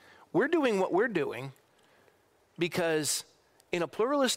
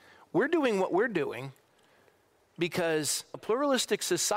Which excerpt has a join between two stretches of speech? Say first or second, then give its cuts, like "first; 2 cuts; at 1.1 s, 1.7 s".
second; 1 cut; at 3.3 s